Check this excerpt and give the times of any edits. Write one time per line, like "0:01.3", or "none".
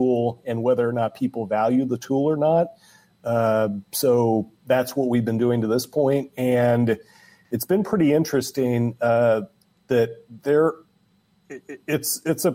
none